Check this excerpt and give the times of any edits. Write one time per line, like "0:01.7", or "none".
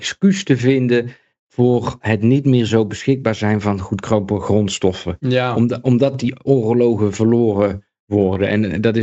none